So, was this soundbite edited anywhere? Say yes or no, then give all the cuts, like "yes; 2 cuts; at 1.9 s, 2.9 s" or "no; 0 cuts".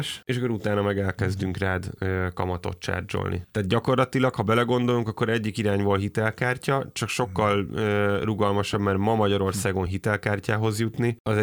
no; 0 cuts